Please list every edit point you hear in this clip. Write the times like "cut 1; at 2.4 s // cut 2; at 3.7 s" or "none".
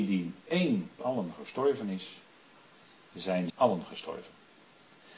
cut 1; at 1.0 s // cut 2; at 3.5 s